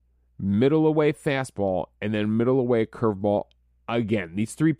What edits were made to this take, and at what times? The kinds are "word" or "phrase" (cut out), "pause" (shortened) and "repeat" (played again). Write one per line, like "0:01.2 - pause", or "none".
none